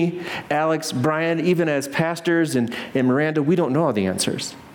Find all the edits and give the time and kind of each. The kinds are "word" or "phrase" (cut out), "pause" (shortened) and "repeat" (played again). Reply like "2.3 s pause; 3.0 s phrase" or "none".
none